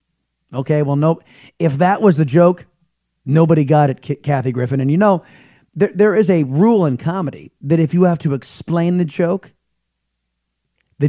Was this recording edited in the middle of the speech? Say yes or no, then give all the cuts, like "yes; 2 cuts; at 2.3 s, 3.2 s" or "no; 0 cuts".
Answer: no; 0 cuts